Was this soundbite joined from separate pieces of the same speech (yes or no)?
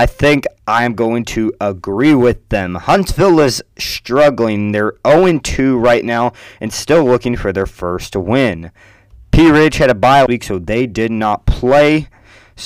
yes